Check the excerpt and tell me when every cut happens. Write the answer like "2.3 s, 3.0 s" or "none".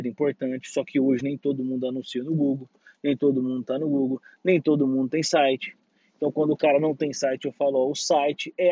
none